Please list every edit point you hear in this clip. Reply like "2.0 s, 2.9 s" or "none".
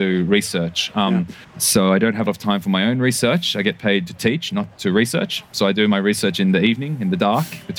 1.4 s, 2.3 s